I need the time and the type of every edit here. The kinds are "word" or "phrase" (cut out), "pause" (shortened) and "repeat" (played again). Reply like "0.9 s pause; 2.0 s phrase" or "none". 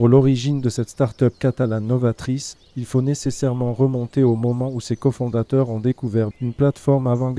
6.3 s word